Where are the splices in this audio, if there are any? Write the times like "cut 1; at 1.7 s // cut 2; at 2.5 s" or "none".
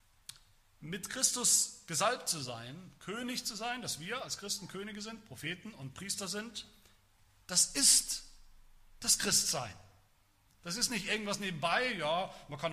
none